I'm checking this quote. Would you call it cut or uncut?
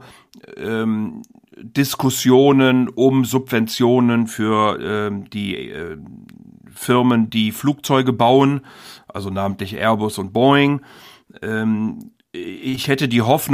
uncut